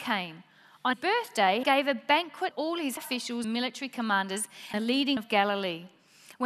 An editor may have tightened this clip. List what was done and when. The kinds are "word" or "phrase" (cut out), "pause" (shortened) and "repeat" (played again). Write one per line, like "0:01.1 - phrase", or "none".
0:00.9 - word
0:01.6 - word
0:02.5 - word
0:03.0 - word
0:03.4 - word
0:04.7 - word
0:05.2 - word

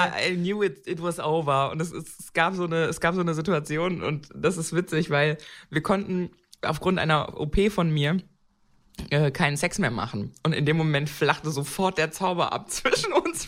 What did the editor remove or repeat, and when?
none

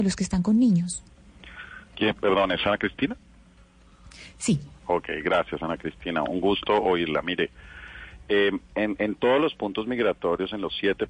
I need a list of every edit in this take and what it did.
0:01.8 - pause
0:04.8 - pause

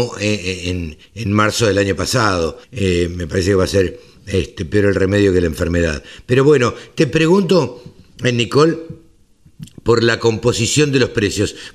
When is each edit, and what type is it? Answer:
0:01.1 - pause
0:02.6 - pause

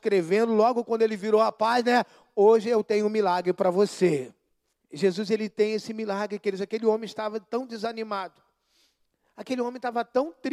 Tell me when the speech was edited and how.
0:04.7 - pause

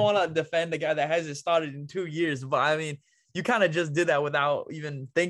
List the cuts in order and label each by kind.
none

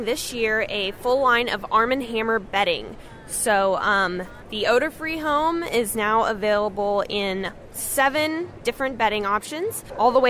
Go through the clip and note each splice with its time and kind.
none

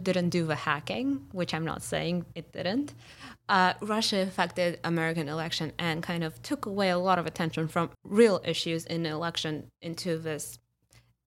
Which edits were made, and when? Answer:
0:07.9 - pause

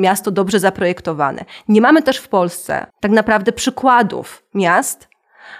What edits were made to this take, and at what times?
0:02.9 - pause

